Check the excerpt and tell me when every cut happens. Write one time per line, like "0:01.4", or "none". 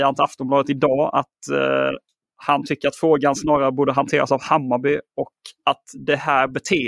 none